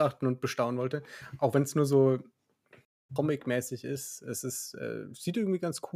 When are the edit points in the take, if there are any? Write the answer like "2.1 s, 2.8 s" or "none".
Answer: none